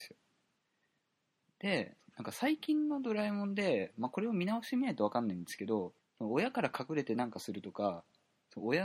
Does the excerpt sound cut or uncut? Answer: cut